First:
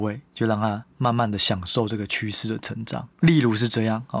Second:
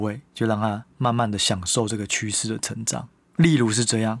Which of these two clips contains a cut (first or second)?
first